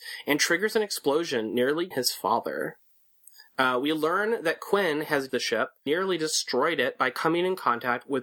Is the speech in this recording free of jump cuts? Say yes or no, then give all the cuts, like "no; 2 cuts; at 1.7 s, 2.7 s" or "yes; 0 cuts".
no; 3 cuts; at 1.9 s, 5.3 s, 5.9 s